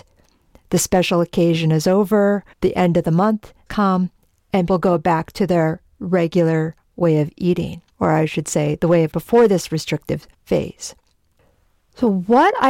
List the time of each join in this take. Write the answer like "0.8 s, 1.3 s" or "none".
2.5 s, 3.7 s, 4.7 s, 7.9 s, 9.1 s, 10.3 s